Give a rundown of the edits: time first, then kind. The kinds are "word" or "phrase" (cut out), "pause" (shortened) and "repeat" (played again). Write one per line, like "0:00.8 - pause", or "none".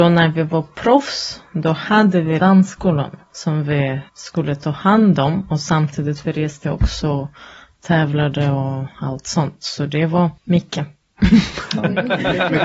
0:02.4 - phrase
0:03.3 - pause
0:04.1 - pause
0:06.6 - word
0:10.4 - pause